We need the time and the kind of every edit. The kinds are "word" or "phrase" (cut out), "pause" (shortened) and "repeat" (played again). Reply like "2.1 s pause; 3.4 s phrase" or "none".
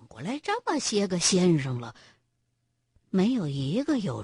none